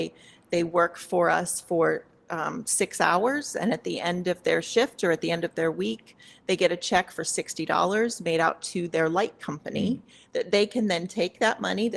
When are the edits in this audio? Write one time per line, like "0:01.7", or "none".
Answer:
none